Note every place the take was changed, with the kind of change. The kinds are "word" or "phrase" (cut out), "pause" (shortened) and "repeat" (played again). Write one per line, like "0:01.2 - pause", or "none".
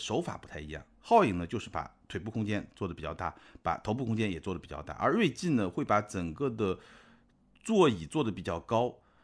none